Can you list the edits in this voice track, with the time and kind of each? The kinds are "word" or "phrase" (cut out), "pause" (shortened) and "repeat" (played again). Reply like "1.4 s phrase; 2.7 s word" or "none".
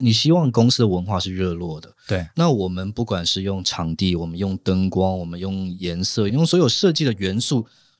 6.3 s phrase